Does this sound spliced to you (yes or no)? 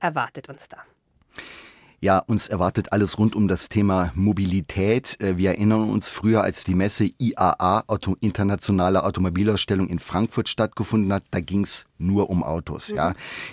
no